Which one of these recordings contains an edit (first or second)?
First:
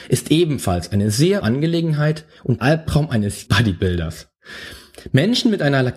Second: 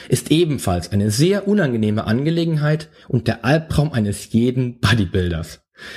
first